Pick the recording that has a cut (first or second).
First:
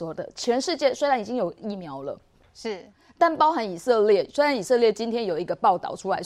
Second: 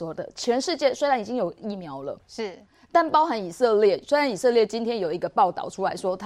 second